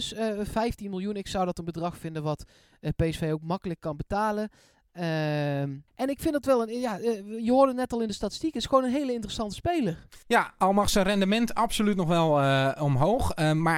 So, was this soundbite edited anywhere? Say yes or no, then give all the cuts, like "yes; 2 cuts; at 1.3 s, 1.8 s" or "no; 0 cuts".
yes; 2 cuts; at 5.9 s, 10.2 s